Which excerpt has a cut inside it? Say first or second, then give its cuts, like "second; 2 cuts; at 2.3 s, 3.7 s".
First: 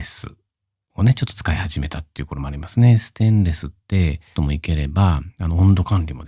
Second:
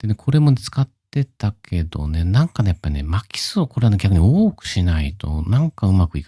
first; 1 cut; at 4.3 s